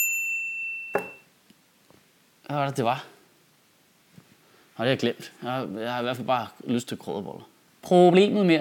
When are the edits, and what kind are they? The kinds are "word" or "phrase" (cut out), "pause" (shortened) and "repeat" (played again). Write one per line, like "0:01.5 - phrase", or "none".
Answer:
none